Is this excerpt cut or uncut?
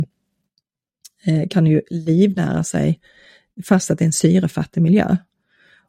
uncut